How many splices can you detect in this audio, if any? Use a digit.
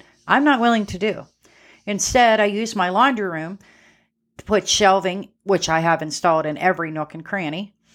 0